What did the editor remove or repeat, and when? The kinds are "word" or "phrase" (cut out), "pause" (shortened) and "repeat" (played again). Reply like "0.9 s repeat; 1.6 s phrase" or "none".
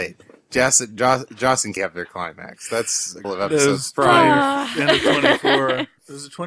1.8 s word; 3.2 s word